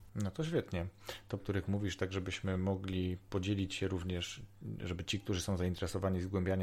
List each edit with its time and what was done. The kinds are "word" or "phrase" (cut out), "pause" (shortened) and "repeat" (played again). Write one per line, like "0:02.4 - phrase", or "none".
0:01.4 - phrase